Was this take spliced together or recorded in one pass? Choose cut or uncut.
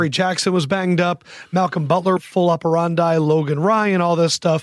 cut